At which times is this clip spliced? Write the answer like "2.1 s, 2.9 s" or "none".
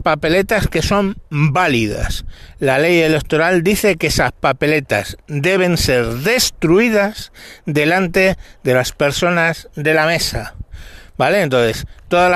none